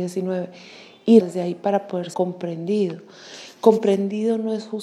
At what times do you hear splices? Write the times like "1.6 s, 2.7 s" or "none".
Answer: 1.2 s, 2.1 s

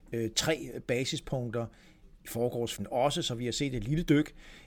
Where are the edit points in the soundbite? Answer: 2.8 s

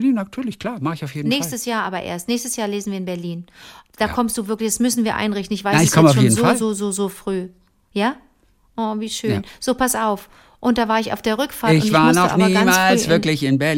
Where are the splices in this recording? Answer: none

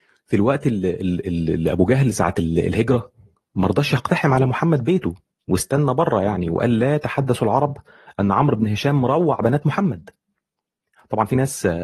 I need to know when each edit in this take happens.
5.3 s

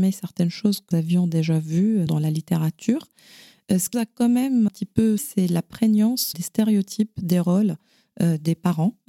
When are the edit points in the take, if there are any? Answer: 0.9 s, 2.1 s, 3.9 s, 4.7 s, 5.2 s, 6.3 s

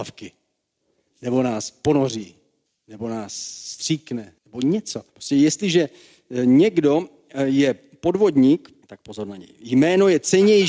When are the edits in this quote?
2.7 s, 4.4 s, 5.1 s, 8.8 s

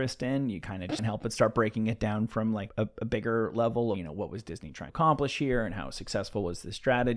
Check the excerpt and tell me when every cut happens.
1.0 s, 2.7 s, 3.9 s, 4.9 s

